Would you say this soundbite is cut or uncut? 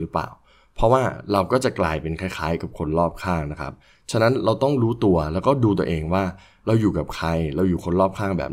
uncut